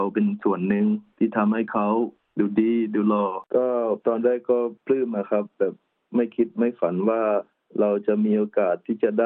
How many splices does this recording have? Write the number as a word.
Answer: three